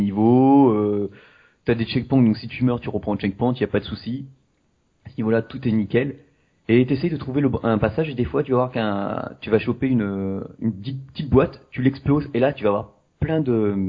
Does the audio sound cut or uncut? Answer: uncut